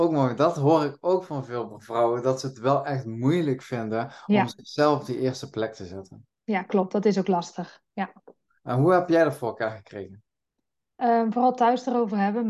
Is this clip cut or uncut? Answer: uncut